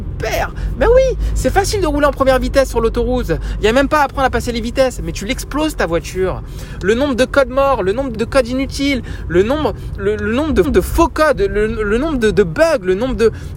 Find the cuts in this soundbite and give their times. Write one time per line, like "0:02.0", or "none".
0:08.1
0:10.0
0:10.6
0:11.3